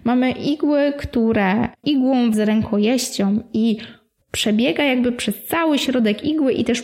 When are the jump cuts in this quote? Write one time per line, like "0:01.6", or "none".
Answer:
0:01.8
0:02.3
0:04.2